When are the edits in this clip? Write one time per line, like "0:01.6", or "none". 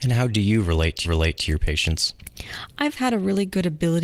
0:01.0
0:03.0

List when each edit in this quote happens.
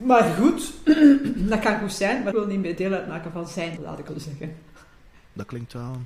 0:02.3
0:03.8
0:04.1

